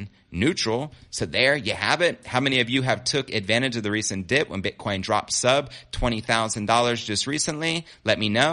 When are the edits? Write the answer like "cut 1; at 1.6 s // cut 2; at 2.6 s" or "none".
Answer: none